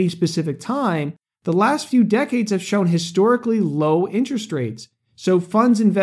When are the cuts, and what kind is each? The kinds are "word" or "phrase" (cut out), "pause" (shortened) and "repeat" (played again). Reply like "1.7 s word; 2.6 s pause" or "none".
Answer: none